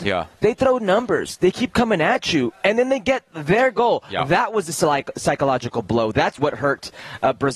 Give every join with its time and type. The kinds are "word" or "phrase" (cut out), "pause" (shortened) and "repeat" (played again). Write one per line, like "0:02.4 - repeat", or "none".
0:06.4 - word